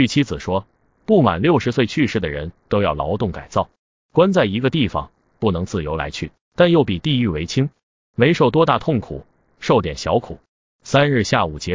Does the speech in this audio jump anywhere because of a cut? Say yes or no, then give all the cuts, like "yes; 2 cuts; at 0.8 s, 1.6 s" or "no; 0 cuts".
no; 0 cuts